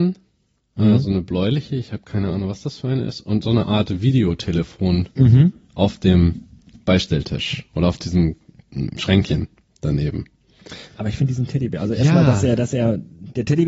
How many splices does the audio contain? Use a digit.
0